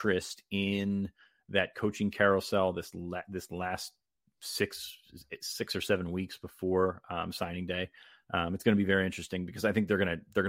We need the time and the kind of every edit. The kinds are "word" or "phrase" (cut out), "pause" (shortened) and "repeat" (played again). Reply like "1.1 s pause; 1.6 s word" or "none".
none